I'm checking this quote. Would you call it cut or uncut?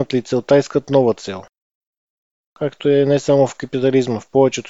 uncut